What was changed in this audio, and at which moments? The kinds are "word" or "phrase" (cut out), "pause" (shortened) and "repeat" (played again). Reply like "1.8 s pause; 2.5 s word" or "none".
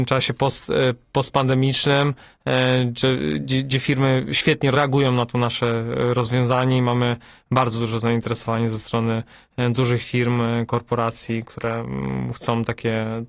none